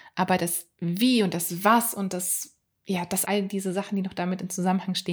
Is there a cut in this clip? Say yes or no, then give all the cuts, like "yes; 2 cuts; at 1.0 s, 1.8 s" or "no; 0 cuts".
yes; 1 cut; at 3.2 s